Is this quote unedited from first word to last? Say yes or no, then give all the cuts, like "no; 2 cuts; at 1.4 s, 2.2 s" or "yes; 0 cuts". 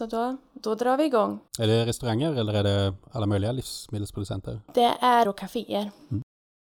no; 3 cuts; at 1.5 s, 4.7 s, 5.2 s